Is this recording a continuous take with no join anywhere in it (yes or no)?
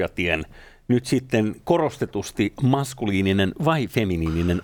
yes